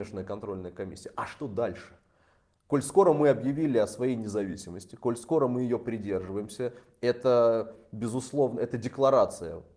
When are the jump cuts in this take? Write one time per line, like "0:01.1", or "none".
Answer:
none